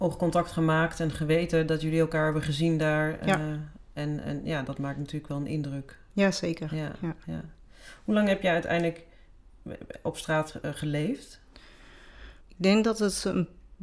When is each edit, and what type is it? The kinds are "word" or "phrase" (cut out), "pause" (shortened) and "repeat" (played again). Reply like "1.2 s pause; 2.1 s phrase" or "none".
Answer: 12.4 s pause